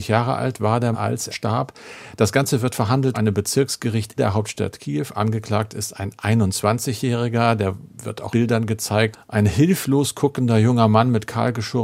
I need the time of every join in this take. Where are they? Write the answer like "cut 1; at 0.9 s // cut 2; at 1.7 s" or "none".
cut 1; at 0.9 s // cut 2; at 1.3 s // cut 3; at 3.1 s // cut 4; at 4.2 s // cut 5; at 8.3 s // cut 6; at 9.1 s